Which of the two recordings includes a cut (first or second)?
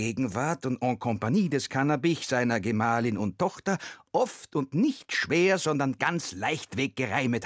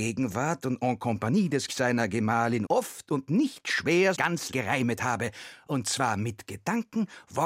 second